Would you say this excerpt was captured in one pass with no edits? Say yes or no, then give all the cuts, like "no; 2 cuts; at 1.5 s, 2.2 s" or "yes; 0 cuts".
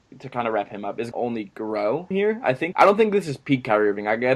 no; 3 cuts; at 1.1 s, 2.1 s, 2.7 s